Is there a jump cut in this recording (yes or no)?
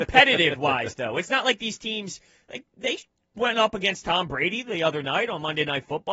no